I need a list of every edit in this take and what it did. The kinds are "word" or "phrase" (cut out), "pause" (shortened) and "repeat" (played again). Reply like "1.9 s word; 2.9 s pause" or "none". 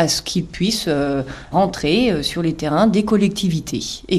1.5 s word